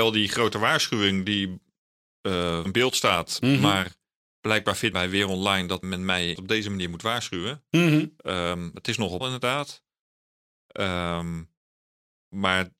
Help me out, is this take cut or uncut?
cut